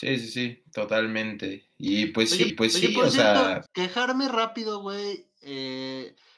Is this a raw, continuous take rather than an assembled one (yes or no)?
no